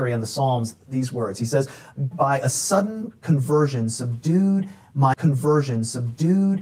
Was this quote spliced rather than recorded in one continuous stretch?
yes; 2 cuts; at 2.1 s, 5.1 s

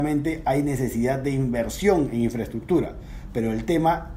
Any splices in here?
no; 0 cuts

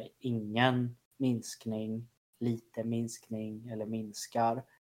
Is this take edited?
no; 0 cuts

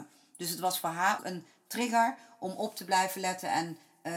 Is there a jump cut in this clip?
yes; 1 cut; at 1.2 s

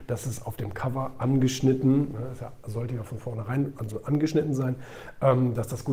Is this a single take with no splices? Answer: yes; 0 cuts

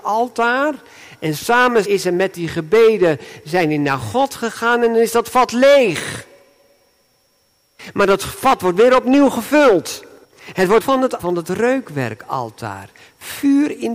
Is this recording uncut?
no; 4 cuts; at 1.8 s, 10.2 s, 10.8 s, 11.2 s

